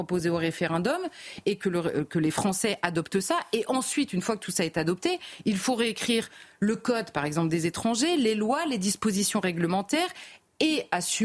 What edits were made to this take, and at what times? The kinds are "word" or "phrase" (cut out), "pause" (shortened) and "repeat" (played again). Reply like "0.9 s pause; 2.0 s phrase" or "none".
none